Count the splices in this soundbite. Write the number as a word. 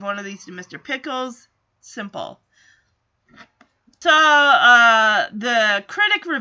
zero